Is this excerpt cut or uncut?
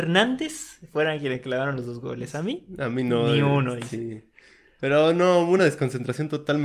uncut